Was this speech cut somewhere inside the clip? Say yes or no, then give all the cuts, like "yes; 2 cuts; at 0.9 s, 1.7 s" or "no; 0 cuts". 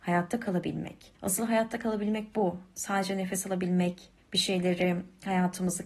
yes; 2 cuts; at 1.2 s, 4.2 s